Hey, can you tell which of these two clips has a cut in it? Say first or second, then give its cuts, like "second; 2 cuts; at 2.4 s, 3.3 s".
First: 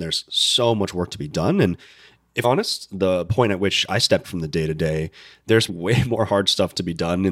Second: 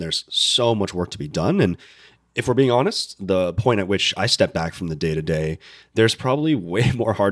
first; 3 cuts; at 2.4 s, 4.2 s, 5.7 s